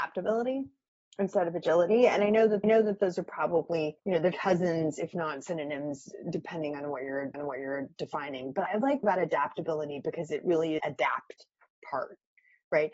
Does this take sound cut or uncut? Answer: cut